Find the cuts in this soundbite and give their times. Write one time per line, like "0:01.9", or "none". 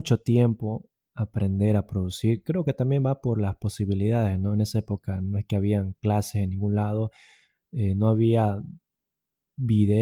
none